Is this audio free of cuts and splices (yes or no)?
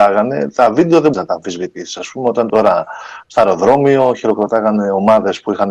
no